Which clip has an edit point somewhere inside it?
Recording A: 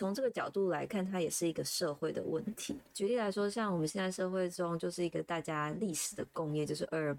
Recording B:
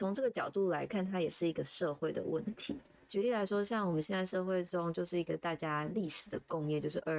A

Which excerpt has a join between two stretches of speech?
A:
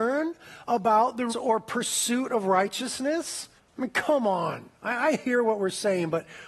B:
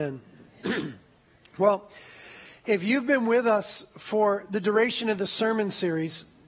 A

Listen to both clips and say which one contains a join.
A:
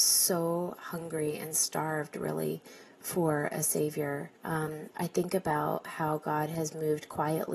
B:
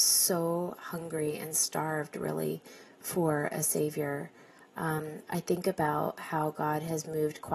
A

